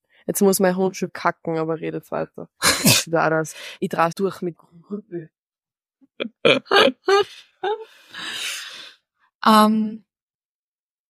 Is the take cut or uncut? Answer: cut